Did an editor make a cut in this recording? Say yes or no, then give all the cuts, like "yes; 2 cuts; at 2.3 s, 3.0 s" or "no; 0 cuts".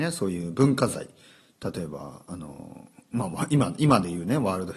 no; 0 cuts